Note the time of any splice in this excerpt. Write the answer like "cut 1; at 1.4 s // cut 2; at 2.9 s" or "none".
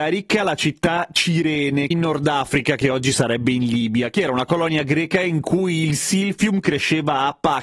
none